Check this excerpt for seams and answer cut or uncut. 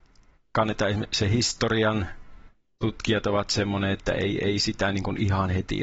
uncut